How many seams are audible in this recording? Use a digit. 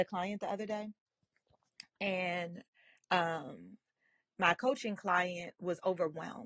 0